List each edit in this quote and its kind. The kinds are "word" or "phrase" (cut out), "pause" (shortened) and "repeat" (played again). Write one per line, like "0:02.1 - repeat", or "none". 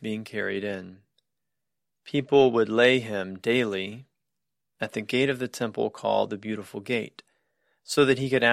none